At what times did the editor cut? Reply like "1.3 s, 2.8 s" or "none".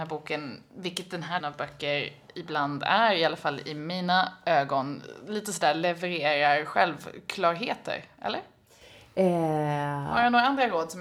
1.4 s